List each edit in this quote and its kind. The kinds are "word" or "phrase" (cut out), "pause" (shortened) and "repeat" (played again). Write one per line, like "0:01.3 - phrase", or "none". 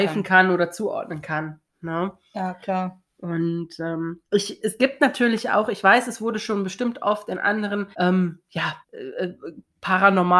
0:04.2 - pause
0:07.9 - pause
0:08.8 - pause